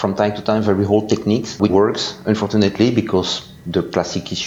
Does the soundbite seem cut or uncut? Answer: cut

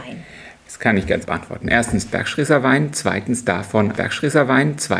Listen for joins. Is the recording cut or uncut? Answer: cut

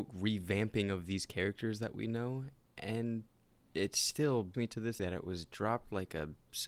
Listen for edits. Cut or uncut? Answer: cut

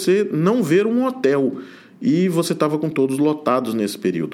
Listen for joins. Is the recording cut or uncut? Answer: uncut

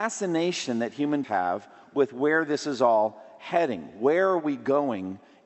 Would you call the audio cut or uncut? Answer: cut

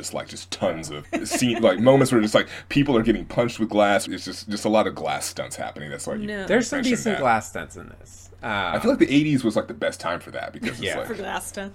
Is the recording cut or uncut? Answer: cut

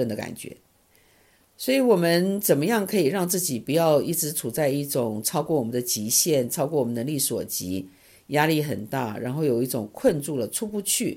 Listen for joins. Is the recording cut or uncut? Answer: uncut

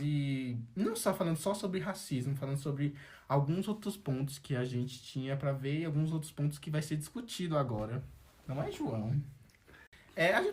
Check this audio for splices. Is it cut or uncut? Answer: uncut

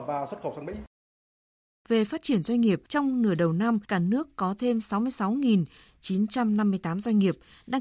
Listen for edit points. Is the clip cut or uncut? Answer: cut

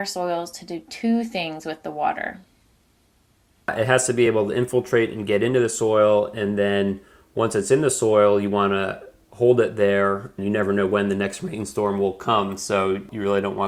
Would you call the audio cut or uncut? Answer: uncut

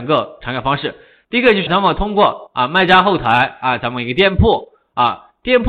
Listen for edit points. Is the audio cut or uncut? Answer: cut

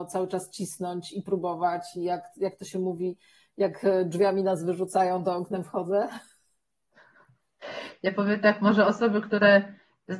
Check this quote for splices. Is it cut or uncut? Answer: uncut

